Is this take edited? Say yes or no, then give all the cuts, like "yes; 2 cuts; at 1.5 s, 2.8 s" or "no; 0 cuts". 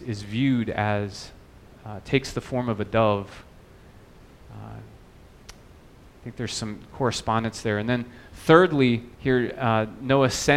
yes; 1 cut; at 9.1 s